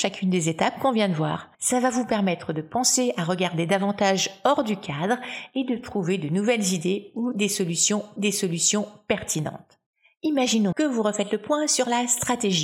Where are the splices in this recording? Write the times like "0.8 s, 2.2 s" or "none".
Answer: 1.5 s, 8.2 s, 10.7 s